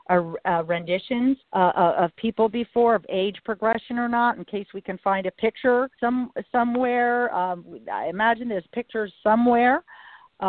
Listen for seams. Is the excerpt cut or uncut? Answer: cut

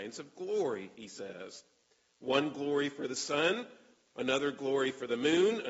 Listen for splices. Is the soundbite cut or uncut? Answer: uncut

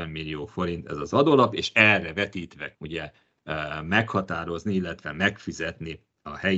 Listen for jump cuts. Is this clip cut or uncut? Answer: cut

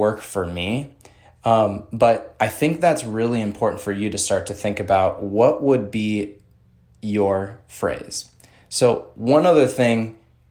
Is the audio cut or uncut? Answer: uncut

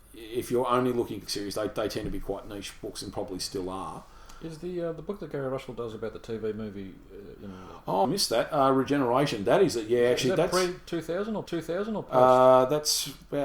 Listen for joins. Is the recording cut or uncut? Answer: cut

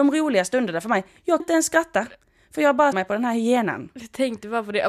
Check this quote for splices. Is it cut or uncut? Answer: cut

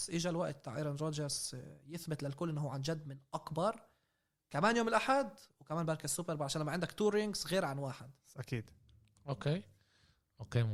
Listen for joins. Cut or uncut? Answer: uncut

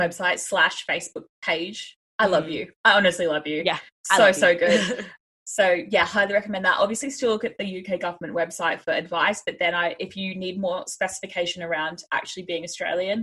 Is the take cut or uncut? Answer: cut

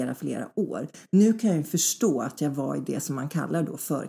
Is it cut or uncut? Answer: uncut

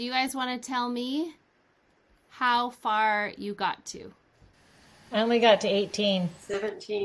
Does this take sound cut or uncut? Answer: uncut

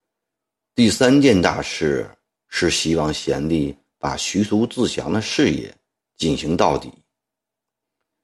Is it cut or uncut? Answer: uncut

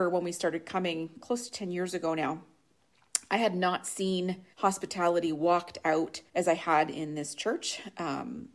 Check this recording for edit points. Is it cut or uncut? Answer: cut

